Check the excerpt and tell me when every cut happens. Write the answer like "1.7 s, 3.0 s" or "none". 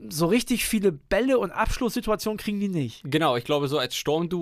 none

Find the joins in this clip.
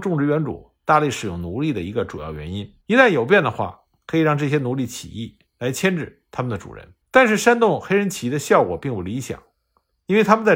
2.8 s, 5.5 s, 7.0 s

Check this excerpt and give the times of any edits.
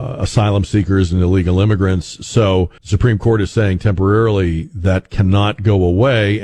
2.8 s

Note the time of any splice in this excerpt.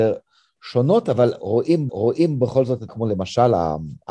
1.9 s, 2.9 s

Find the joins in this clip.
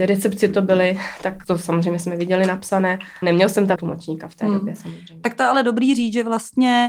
1.4 s, 3.2 s, 3.8 s

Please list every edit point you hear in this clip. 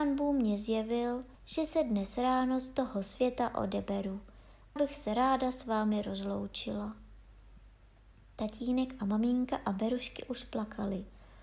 1.3 s, 4.8 s

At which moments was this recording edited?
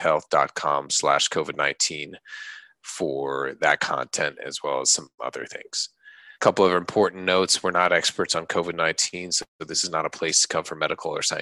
6.3 s

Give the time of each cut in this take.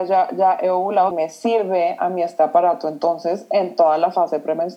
1.1 s

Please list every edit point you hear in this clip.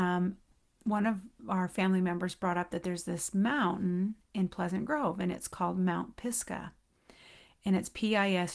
none

